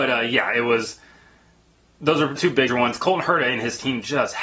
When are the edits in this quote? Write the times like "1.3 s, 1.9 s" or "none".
2.4 s, 2.7 s